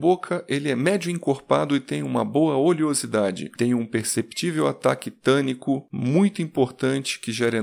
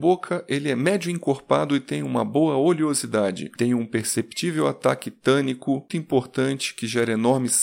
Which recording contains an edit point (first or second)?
second